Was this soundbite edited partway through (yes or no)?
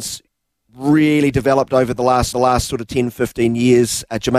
yes